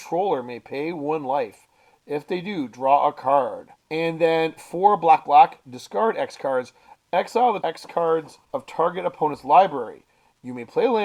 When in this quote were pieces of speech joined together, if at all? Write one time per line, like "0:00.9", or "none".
0:03.8
0:05.2
0:07.6
0:08.4

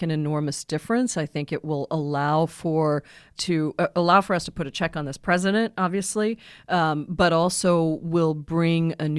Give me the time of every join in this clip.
0:03.4

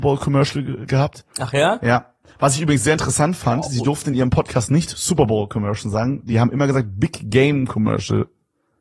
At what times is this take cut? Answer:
none

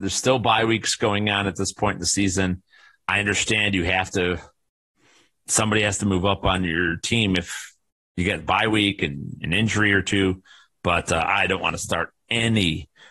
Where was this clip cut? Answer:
none

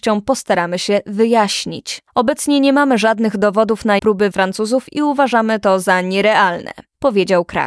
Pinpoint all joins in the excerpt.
0:04.0
0:04.3

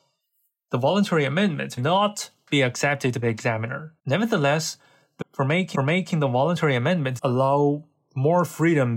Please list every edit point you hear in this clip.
0:01.8
0:03.2
0:04.0
0:05.2
0:05.7
0:07.2

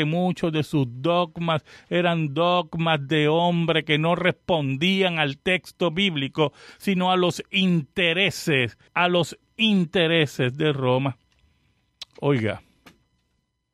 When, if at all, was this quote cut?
0:08.9

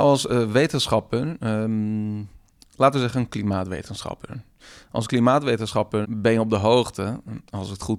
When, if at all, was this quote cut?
0:06.0

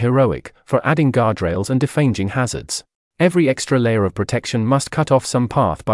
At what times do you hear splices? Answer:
0:03.0

